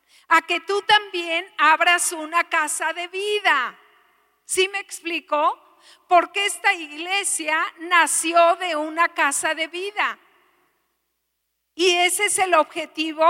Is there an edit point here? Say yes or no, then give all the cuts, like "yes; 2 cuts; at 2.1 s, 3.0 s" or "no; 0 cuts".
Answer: no; 0 cuts